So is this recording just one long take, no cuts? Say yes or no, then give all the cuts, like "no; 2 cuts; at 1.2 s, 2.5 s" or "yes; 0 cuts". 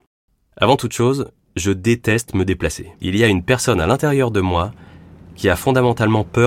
no; 1 cut; at 2.9 s